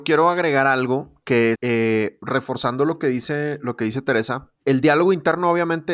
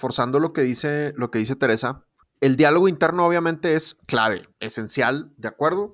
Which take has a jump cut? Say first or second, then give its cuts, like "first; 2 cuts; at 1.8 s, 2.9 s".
first; 2 cuts; at 1.5 s, 4.6 s